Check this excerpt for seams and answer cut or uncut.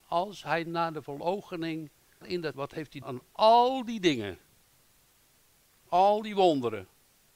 cut